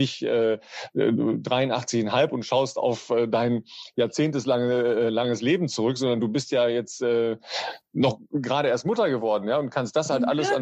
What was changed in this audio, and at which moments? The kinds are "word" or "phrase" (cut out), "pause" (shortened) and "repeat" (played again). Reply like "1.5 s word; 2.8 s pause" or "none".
none